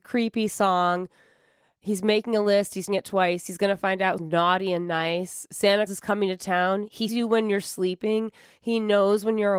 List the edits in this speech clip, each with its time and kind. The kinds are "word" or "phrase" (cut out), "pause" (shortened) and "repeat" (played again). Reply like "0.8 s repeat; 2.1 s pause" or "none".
2.9 s word; 4.2 s word; 5.9 s word; 7.1 s word